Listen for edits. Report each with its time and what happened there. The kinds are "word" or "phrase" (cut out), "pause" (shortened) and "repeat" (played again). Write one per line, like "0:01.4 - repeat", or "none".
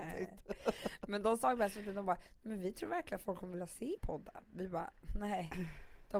0:04.0 - word